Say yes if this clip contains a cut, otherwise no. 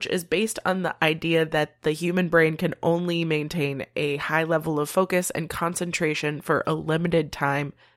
no